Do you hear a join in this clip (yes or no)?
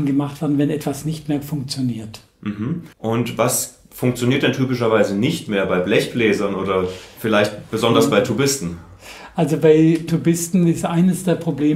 yes